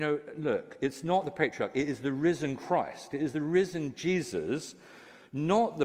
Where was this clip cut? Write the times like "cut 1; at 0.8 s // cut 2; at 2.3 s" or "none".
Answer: none